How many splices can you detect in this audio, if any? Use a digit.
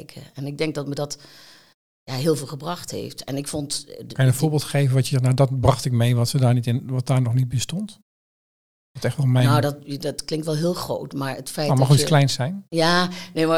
0